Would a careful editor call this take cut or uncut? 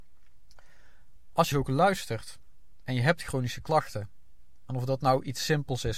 cut